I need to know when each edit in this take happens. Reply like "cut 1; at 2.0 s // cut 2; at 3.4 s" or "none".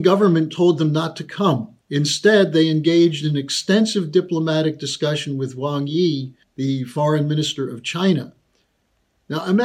cut 1; at 1.8 s // cut 2; at 6.4 s